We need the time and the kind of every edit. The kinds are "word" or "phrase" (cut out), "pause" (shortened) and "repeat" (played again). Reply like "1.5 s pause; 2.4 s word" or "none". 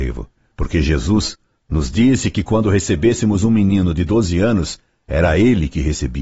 none

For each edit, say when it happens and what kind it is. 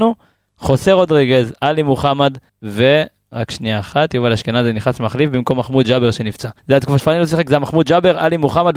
2.5 s pause; 6.6 s pause; 7.0 s word

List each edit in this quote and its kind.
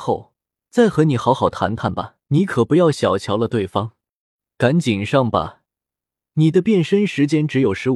2.2 s pause

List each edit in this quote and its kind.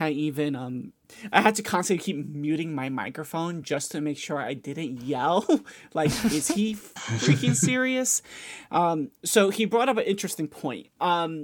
none

